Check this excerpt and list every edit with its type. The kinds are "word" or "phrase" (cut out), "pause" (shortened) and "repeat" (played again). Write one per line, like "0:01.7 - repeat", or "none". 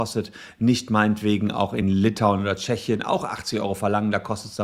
none